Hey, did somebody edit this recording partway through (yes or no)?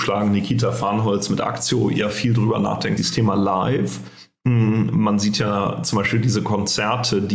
yes